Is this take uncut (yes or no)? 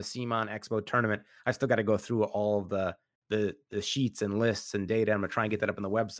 yes